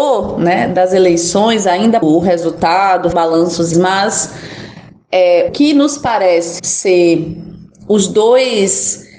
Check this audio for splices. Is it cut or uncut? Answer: cut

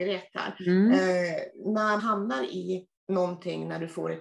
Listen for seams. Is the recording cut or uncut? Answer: cut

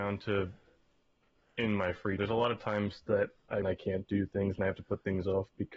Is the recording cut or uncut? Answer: cut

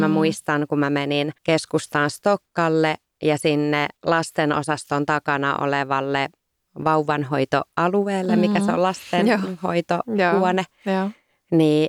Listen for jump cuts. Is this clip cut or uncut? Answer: cut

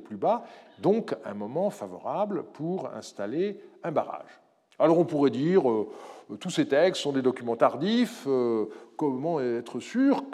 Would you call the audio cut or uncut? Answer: uncut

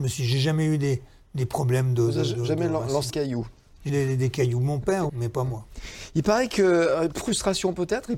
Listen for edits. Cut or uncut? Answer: cut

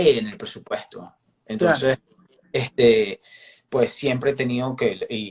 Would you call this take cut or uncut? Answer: uncut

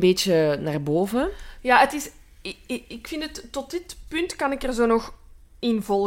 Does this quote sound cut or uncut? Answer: uncut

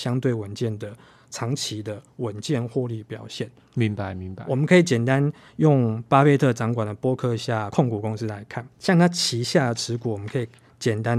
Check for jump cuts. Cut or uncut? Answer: cut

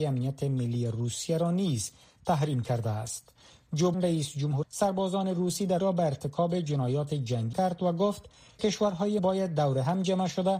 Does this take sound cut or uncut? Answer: cut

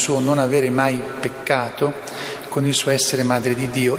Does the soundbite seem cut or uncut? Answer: uncut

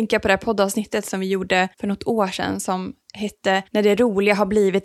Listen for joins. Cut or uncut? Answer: cut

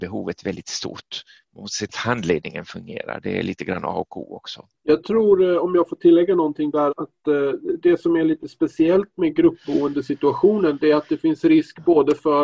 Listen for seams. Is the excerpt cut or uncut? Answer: cut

